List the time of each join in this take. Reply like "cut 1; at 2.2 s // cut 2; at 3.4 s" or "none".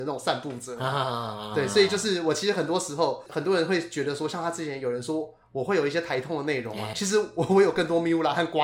cut 1; at 6.9 s